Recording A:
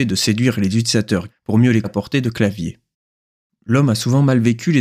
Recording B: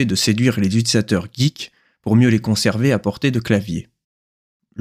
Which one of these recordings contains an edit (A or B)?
A